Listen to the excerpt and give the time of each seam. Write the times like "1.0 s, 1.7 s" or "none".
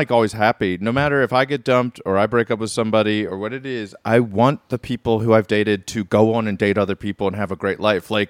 none